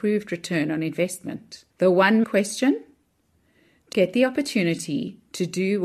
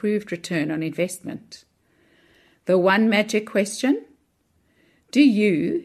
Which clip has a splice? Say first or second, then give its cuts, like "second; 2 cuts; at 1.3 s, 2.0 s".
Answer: first; 3 cuts; at 1.7 s, 2.2 s, 3.9 s